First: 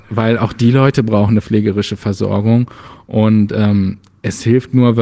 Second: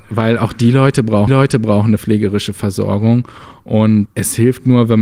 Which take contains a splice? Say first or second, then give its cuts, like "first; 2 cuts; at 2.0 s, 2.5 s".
second; 2 cuts; at 1.3 s, 4.1 s